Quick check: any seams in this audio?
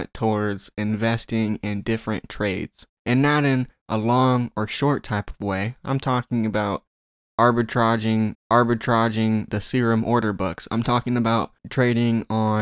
yes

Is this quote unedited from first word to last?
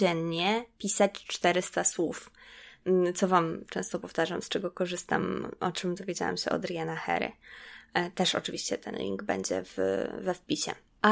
yes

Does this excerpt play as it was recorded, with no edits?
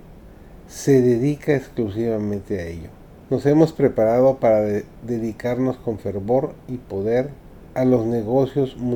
no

